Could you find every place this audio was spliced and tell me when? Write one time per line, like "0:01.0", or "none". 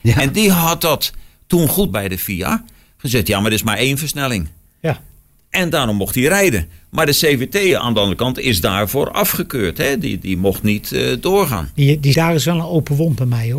0:01.9
0:12.1

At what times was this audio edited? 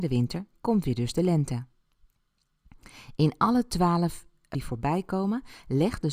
0:04.5

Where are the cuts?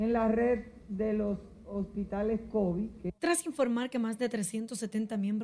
0:03.2

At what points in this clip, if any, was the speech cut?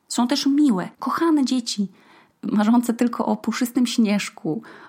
0:00.9

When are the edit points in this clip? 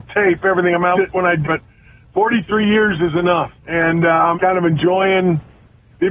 0:00.9
0:01.4
0:03.6
0:04.3

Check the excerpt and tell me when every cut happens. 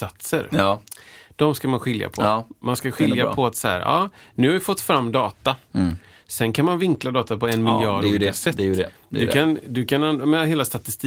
none

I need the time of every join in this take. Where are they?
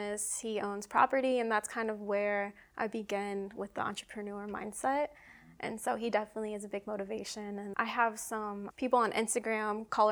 0:07.7
0:08.7

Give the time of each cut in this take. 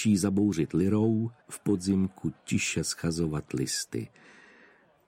0:01.4

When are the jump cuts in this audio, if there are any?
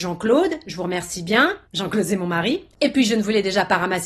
0:01.7
0:02.7

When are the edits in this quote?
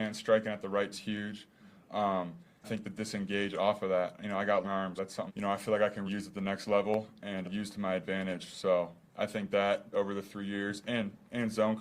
0:00.9
0:02.6
0:04.6
0:05.0
0:05.3
0:06.1
0:07.4
0:09.9

